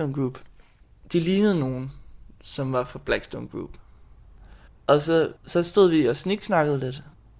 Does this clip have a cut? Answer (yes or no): yes